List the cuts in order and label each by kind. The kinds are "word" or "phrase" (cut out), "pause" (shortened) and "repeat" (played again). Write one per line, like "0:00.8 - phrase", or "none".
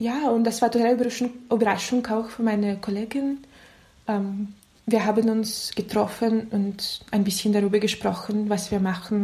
none